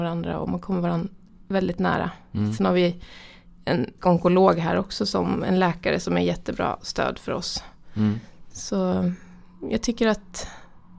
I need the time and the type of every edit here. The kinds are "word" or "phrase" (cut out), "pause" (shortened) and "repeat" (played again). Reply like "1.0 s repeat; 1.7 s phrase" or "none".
4.0 s word